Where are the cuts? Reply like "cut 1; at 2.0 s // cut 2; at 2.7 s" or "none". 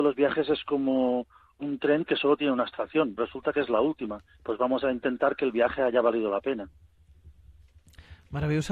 cut 1; at 3.2 s